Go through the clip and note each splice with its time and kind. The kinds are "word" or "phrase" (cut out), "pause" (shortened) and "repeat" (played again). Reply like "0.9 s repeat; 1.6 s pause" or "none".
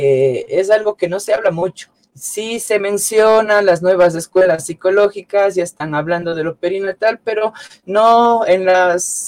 1.9 s pause